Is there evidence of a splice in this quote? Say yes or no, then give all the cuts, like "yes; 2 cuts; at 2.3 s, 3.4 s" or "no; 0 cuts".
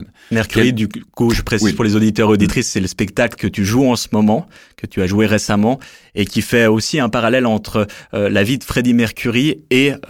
no; 0 cuts